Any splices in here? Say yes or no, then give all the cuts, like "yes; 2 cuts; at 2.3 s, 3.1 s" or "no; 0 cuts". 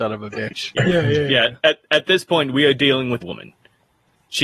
yes; 1 cut; at 3.2 s